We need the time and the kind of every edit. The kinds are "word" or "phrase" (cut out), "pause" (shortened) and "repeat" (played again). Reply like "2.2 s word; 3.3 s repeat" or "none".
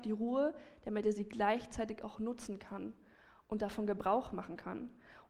none

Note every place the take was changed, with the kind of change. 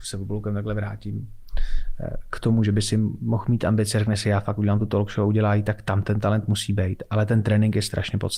none

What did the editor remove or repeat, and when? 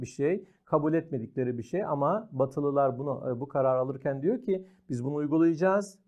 none

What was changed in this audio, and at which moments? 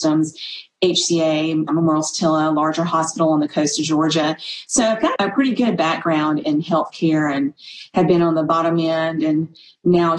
1.7 s word; 5.2 s word

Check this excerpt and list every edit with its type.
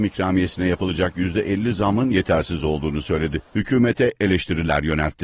3.5 s pause

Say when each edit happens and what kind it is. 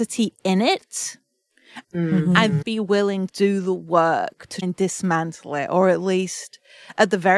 2.6 s word; 3.3 s word; 4.6 s word

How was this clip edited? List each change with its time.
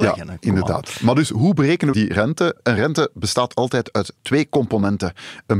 1.9 s word

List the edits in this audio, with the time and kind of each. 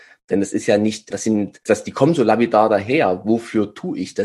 1.1 s word; 1.7 s word

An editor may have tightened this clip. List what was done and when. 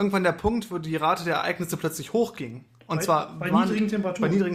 none

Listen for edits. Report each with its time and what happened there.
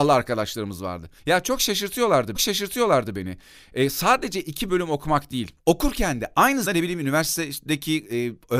1.2 s pause; 2.3 s repeat; 4.7 s phrase; 5.6 s pause; 6.7 s word

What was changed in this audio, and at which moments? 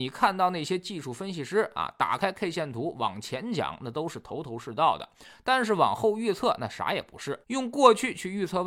7.4 s pause

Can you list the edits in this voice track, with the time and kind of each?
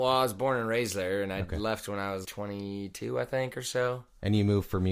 2.2 s word

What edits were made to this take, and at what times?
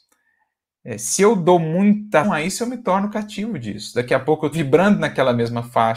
2.2 s word; 4.5 s word

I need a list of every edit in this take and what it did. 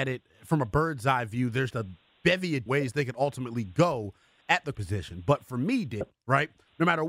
1.7 s word; 2.7 s word; 4.7 s word; 6.0 s word

